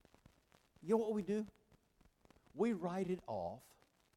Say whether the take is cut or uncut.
uncut